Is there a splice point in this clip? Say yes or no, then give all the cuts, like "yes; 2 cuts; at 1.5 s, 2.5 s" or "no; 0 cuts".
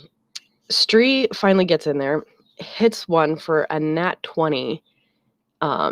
no; 0 cuts